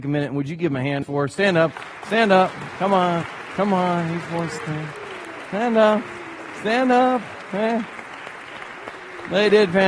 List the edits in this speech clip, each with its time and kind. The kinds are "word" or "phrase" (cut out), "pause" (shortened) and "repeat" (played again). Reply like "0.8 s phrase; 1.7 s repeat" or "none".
1.0 s phrase

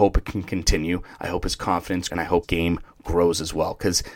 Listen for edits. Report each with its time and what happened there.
2.1 s word; 2.4 s word

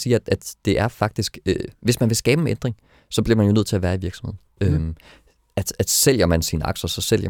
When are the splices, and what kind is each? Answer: none

